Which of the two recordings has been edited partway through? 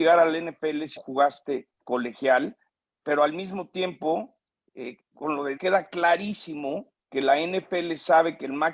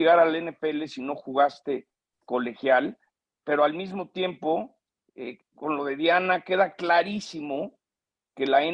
first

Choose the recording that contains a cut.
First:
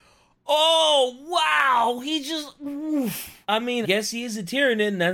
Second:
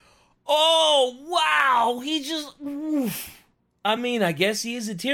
first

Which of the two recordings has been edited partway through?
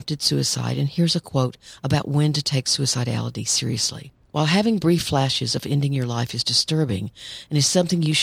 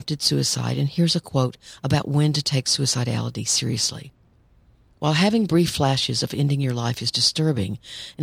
first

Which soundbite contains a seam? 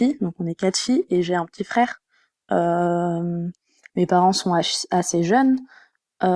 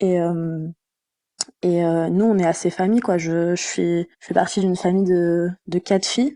second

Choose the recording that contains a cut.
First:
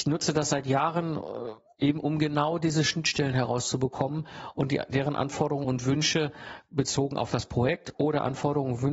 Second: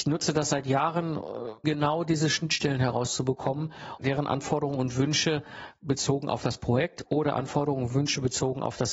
second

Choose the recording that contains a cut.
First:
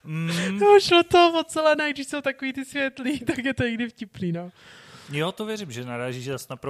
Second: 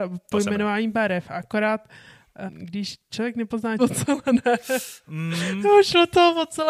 second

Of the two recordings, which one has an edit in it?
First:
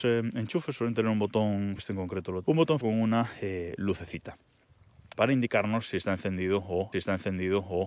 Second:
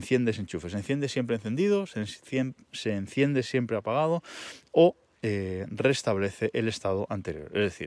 first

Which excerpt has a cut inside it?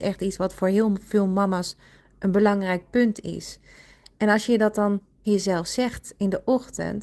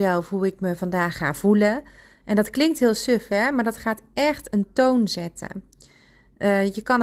first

